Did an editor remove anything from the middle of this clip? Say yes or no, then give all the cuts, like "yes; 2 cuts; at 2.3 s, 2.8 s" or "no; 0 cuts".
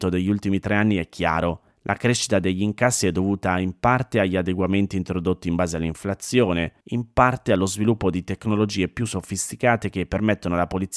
yes; 2 cuts; at 1.7 s, 6.8 s